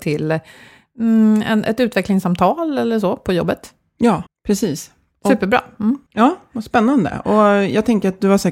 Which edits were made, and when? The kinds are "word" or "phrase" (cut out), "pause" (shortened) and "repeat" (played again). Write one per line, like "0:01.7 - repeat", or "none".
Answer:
0:04.3 - pause
0:06.1 - pause